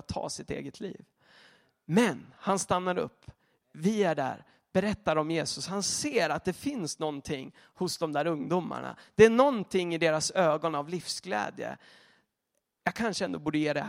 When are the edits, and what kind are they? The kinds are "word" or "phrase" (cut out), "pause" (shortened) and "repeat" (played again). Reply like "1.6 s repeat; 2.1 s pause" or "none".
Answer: none